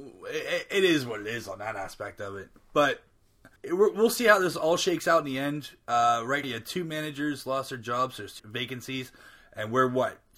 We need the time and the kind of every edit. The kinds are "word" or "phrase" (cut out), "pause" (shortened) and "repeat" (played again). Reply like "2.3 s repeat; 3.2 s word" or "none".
3.6 s pause; 6.4 s word; 8.4 s word

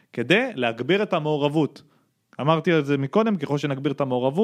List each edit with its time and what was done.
none

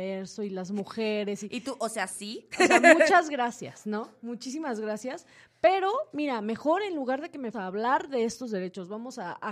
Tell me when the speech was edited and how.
7.5 s phrase

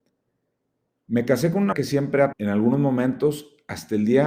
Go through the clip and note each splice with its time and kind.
1.7 s word; 2.3 s word

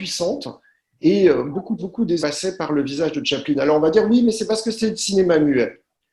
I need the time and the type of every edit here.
1.8 s word; 2.2 s word

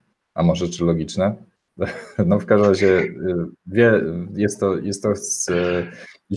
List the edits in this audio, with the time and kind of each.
none

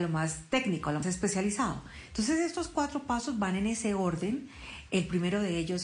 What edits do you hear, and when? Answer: 1.0 s word

